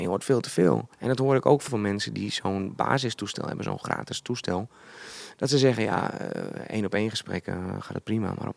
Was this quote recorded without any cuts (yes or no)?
no